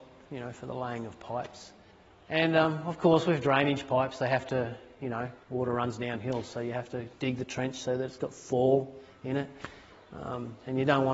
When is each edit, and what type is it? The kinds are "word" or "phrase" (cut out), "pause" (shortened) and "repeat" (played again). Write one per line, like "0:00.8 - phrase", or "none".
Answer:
0:01.9 - pause
0:05.4 - pause
0:07.2 - pause